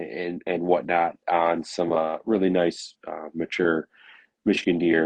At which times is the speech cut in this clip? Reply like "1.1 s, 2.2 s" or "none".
none